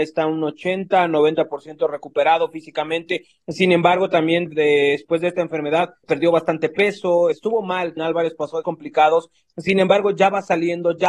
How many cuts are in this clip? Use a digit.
5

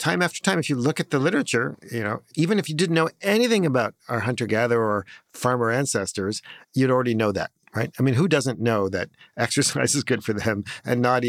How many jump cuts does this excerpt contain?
1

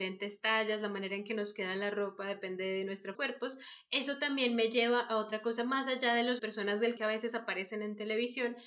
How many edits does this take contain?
3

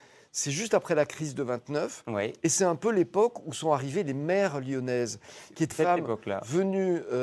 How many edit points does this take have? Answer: 1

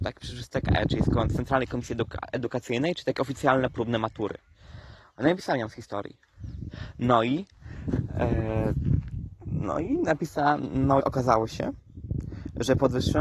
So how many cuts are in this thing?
1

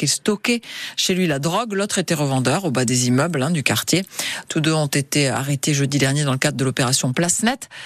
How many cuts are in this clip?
0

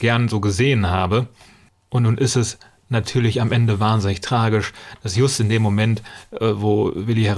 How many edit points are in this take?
0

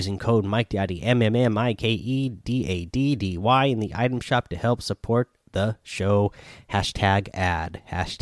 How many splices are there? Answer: 0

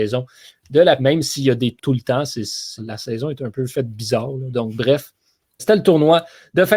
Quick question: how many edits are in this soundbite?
4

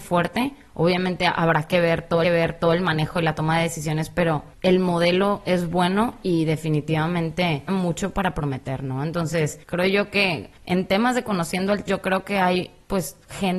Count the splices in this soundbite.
6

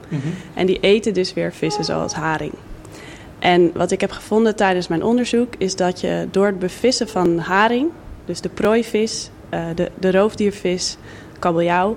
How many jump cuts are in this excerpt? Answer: 0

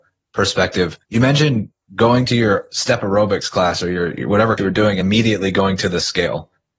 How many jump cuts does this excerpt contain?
3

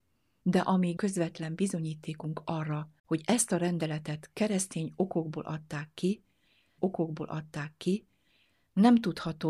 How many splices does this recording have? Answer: 3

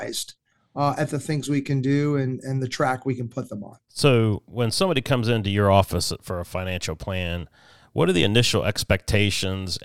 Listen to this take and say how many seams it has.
1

